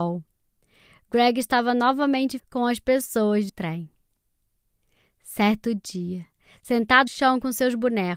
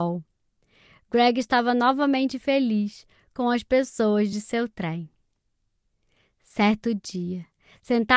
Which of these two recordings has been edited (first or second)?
first